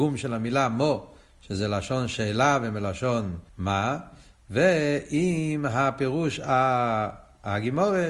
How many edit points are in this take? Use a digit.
1